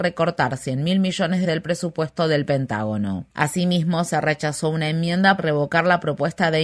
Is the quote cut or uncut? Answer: cut